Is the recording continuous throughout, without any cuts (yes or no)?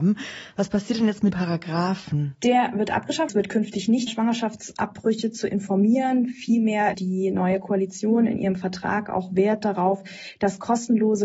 no